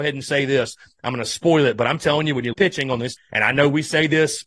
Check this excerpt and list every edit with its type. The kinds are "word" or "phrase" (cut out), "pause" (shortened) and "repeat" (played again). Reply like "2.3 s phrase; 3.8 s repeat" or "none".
2.5 s phrase; 3.2 s word

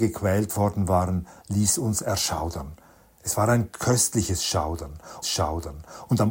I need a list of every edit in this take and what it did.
5.2 s repeat

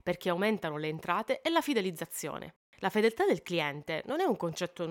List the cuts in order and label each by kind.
none

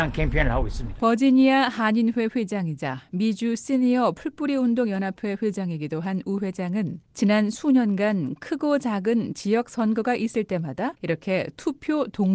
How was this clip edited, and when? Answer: 7.0 s pause; 11.0 s pause

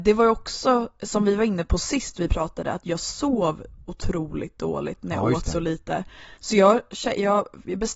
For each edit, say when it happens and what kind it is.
none

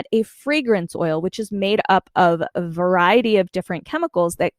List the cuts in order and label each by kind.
none

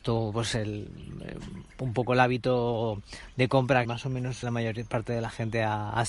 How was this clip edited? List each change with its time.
3.8 s word; 4.4 s phrase

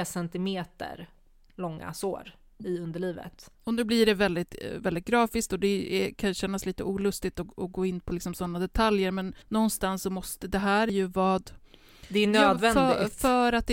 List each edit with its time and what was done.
3.5 s pause; 9.4 s pause

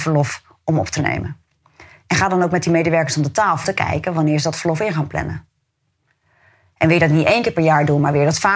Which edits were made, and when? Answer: 3.6 s word

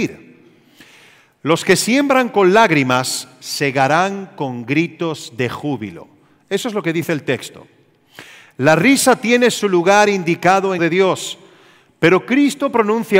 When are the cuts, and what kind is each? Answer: 10.8 s phrase

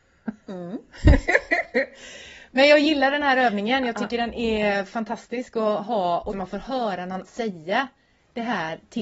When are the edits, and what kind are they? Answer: 6.3 s word; 7.2 s word

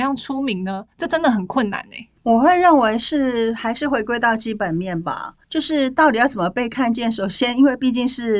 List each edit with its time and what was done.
0.9 s pause; 2.2 s pause; 5.4 s pause

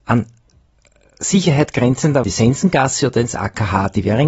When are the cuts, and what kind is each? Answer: 2.2 s phrase

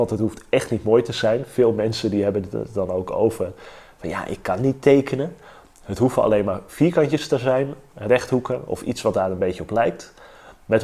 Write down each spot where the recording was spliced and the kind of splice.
none

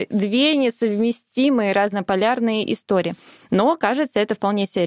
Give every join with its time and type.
none

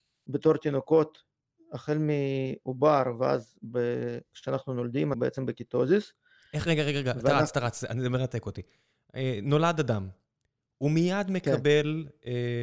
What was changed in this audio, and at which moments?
5.1 s word

